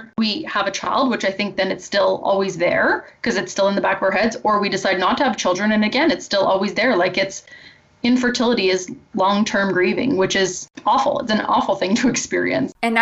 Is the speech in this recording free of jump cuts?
yes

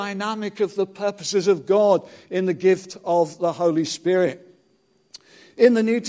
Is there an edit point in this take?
no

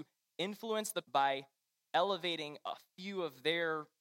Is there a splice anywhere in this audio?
yes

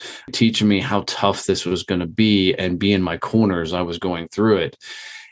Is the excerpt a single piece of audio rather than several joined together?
yes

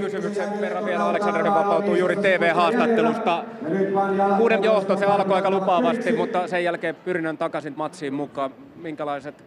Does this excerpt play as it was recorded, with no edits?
no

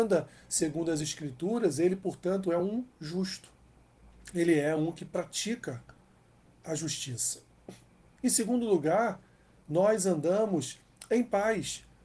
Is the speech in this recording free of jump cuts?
yes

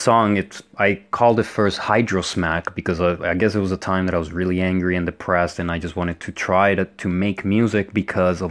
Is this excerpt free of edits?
yes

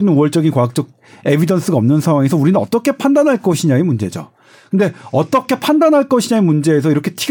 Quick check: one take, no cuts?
yes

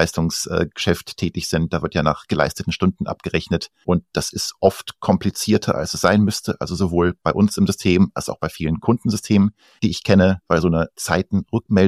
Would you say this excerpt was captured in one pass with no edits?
yes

